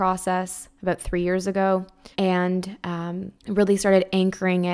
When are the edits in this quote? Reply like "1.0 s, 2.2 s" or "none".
2.1 s, 3.4 s